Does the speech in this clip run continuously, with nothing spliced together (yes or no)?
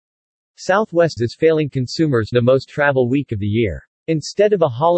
no